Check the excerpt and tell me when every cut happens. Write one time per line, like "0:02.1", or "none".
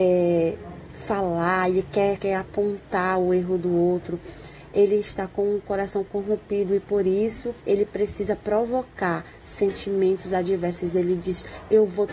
0:02.2
0:07.6